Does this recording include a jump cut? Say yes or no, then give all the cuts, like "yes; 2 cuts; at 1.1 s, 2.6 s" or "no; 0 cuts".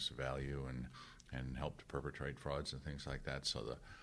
no; 0 cuts